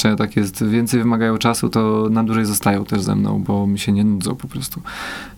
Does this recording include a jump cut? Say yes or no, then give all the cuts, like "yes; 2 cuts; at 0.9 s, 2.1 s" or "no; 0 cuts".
no; 0 cuts